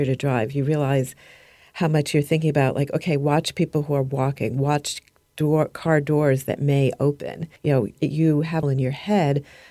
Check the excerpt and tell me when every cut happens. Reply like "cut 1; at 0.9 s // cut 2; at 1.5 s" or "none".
cut 1; at 7.6 s // cut 2; at 8.6 s

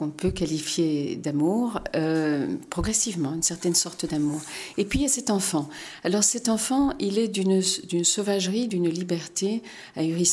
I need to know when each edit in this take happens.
none

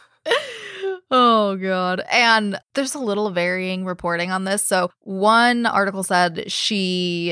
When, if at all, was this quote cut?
cut 1; at 2.6 s

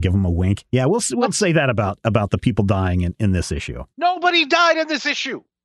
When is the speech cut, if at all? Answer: cut 1; at 3.9 s

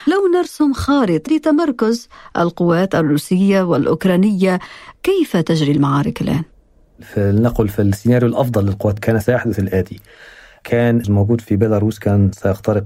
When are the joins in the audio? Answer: cut 1; at 1.3 s // cut 2; at 9.0 s // cut 3; at 11.0 s

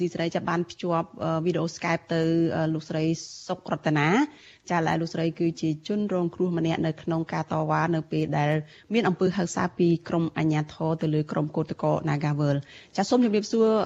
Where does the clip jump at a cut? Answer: none

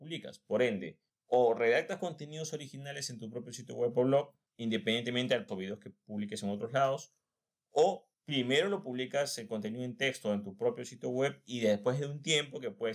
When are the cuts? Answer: cut 1; at 5.5 s

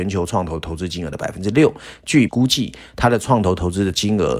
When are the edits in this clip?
cut 1; at 2.3 s

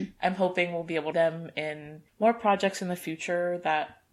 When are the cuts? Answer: cut 1; at 1.1 s // cut 2; at 2.1 s

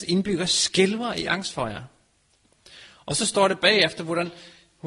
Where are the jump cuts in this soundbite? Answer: none

